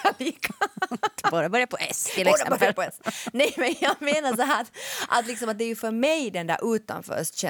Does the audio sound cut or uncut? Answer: uncut